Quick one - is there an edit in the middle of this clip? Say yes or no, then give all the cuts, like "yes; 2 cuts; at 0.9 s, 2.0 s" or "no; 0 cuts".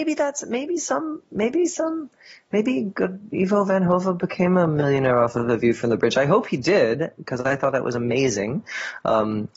no; 0 cuts